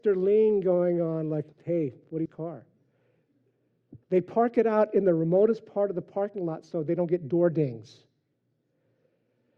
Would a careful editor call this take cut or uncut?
cut